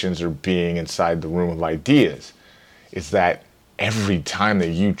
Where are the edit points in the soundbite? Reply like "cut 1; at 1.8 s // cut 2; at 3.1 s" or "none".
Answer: none